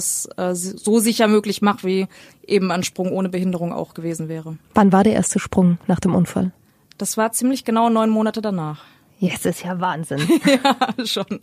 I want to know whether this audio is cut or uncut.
uncut